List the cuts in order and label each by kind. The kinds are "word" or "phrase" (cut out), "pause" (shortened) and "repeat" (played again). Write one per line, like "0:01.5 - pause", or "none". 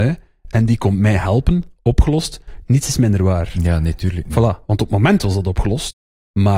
none